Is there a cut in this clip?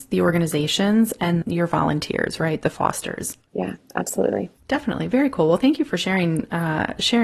yes; 1 cut; at 1.4 s

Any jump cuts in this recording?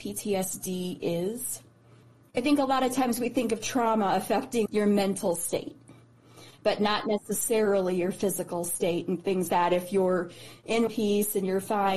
yes; 3 cuts; at 4.7 s, 9.5 s, 10.9 s

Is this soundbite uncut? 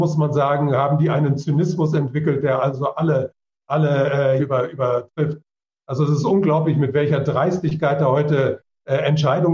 no; 1 cut; at 4.4 s

